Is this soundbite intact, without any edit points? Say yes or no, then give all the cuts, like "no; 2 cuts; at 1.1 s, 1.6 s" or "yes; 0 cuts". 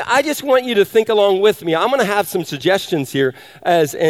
yes; 0 cuts